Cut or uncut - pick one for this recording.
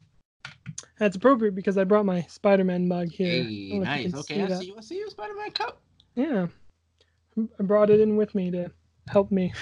uncut